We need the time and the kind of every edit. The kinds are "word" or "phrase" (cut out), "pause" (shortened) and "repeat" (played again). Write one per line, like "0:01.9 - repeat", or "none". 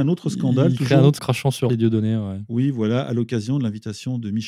0:01.2 - phrase
0:01.7 - phrase

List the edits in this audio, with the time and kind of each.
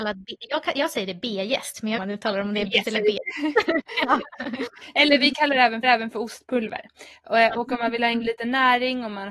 0:02.0 - phrase
0:02.8 - word
0:05.8 - repeat
0:07.5 - word

